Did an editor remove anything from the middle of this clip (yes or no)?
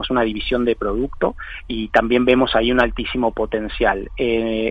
no